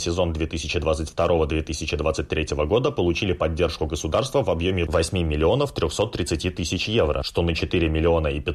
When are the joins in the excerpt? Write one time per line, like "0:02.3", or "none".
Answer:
none